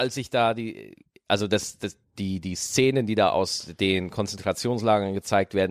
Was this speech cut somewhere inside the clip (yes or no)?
no